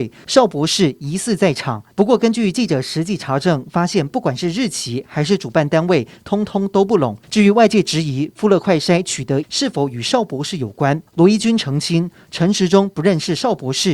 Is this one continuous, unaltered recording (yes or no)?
no